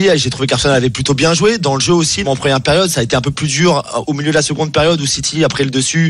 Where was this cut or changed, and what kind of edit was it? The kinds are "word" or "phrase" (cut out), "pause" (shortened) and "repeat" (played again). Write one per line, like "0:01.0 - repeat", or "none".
0:02.2 - word